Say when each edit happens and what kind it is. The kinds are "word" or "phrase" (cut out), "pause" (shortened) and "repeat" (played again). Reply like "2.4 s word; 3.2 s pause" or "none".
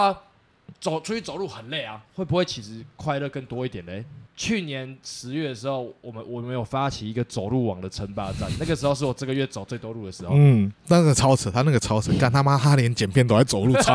2.1 s pause; 10.8 s pause